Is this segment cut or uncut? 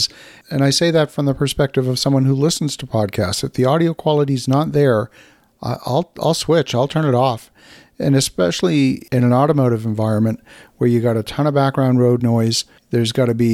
uncut